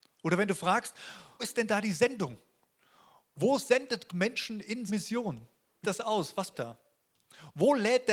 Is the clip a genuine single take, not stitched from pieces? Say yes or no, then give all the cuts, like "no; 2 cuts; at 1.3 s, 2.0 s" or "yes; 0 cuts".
no; 5 cuts; at 1.4 s, 4.1 s, 4.9 s, 5.8 s, 6.5 s